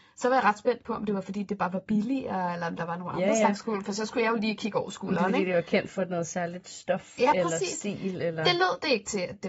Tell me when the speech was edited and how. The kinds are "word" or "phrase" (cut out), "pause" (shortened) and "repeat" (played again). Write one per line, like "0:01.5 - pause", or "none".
none